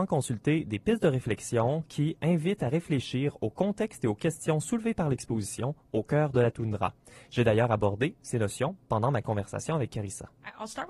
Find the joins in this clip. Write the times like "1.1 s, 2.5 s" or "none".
none